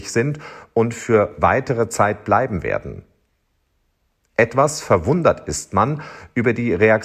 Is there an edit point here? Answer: no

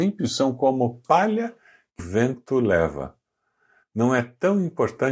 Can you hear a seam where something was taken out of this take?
yes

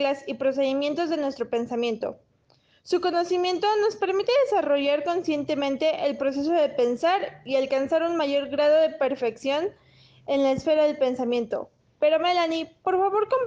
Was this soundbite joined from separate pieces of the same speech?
no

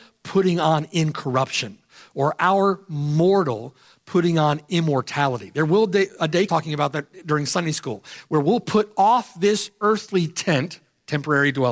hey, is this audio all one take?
no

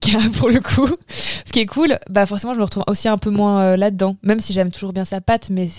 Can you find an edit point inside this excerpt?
no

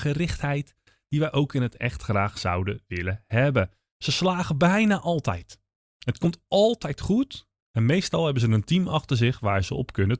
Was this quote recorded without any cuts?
yes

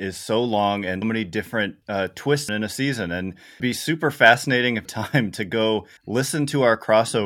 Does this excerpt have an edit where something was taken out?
yes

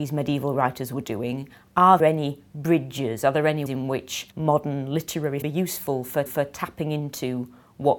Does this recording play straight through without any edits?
no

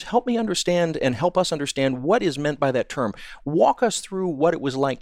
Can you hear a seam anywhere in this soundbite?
no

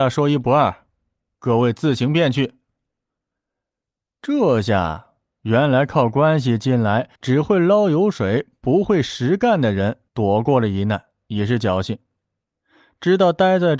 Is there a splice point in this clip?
yes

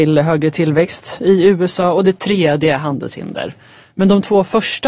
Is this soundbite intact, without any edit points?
yes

